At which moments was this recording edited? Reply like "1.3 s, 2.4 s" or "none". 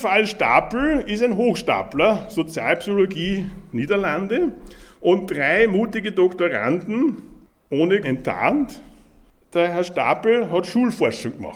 8.0 s